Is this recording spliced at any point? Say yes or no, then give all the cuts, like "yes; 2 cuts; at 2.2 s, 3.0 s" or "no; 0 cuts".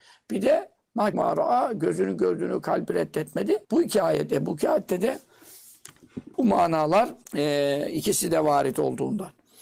yes; 4 cuts; at 1.1 s, 3.6 s, 6.3 s, 7.2 s